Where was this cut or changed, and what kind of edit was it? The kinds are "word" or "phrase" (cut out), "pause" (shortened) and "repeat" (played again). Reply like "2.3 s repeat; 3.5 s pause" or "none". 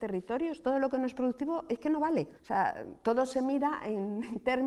2.4 s pause